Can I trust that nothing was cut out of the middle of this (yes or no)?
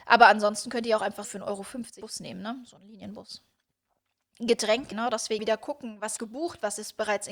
no